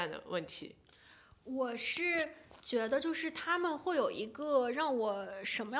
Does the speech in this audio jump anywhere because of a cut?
no; 0 cuts

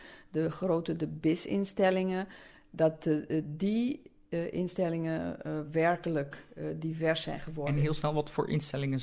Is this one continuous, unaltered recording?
yes; 0 cuts

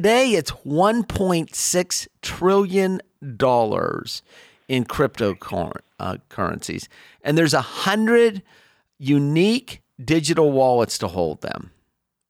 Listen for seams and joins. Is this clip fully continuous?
yes; 0 cuts

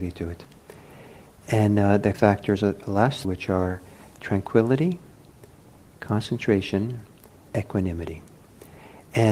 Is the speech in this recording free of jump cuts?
no; 4 cuts; at 2.1 s, 3.2 s, 4.2 s, 7.5 s

